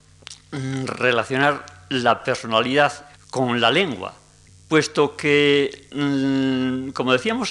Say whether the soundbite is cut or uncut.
cut